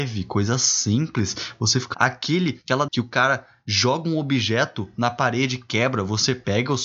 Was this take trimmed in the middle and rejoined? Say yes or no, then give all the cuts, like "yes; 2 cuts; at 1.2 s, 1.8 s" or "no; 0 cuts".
yes; 2 cuts; at 1.9 s, 2.9 s